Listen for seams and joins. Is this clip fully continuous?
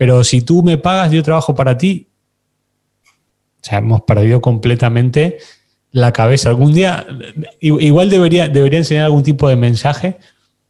yes; 0 cuts

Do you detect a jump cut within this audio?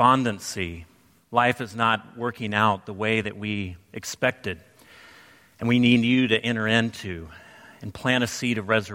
no; 0 cuts

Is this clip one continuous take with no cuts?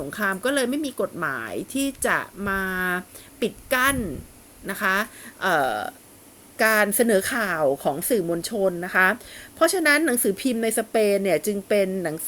yes; 0 cuts

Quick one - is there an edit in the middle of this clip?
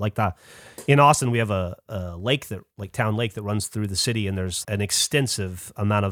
yes; 1 cut; at 4.6 s

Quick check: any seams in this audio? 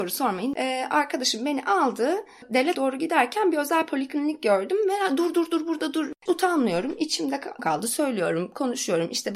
yes; 4 cuts; at 2.7 s, 5.3 s, 6.3 s, 7.6 s

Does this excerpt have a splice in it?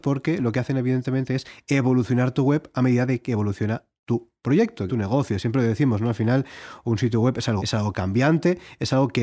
yes; 2 cuts; at 4.9 s, 7.6 s

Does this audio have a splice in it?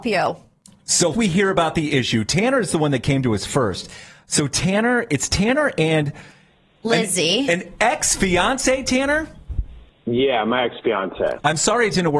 yes; 1 cut; at 1.1 s

